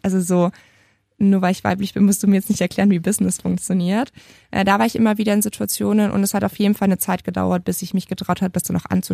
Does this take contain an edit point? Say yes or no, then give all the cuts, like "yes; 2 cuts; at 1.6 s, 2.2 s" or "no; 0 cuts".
no; 0 cuts